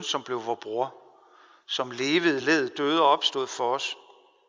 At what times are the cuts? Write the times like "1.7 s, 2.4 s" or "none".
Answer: none